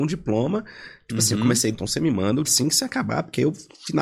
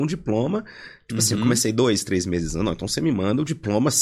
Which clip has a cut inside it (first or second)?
first